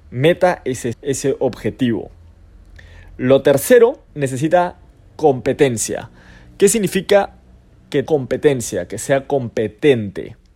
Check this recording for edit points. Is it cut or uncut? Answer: cut